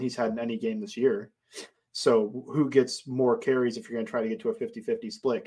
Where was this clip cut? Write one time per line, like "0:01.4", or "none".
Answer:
none